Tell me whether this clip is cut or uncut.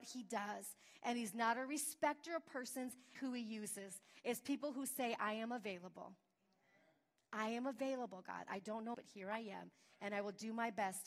cut